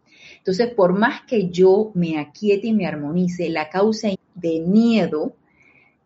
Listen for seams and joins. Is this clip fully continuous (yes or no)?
no